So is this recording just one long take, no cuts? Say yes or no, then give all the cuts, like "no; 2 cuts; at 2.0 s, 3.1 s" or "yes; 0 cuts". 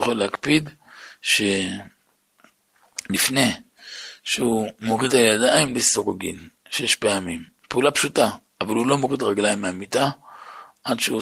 no; 1 cut; at 5.1 s